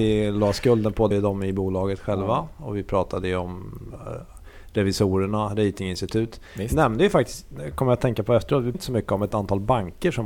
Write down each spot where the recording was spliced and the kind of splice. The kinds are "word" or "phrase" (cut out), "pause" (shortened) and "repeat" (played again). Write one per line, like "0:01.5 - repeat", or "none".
0:01.1 - word
0:08.7 - word